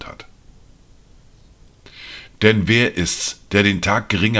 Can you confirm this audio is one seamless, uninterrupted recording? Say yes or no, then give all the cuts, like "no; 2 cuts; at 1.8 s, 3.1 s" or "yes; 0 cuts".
yes; 0 cuts